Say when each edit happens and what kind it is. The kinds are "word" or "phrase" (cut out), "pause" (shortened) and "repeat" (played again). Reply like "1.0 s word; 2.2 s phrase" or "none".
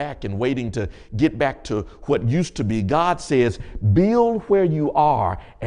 none